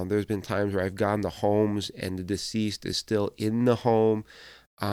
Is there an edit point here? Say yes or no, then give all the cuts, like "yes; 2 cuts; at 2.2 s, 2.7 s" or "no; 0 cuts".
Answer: no; 0 cuts